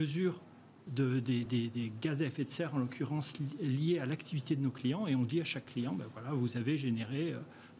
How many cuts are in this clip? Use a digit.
0